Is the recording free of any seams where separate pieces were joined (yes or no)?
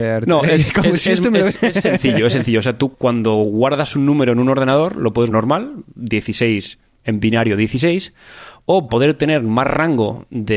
no